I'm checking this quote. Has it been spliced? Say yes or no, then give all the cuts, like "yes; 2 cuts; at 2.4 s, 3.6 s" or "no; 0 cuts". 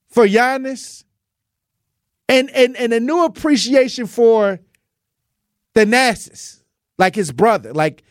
no; 0 cuts